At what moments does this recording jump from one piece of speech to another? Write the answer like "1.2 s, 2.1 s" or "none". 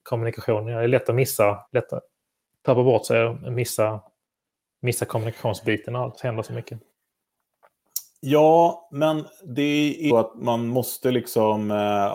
1.7 s, 10.1 s

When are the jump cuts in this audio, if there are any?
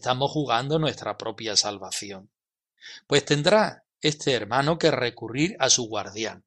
none

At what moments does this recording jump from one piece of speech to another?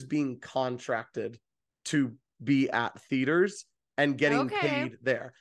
none

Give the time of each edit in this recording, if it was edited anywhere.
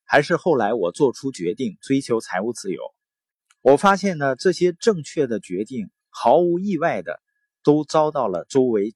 none

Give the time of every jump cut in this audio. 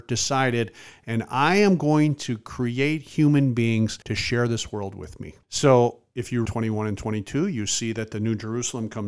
4.0 s, 5.4 s, 6.5 s

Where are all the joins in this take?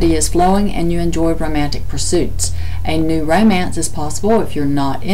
none

